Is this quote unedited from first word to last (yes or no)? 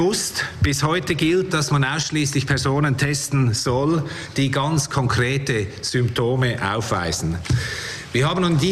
yes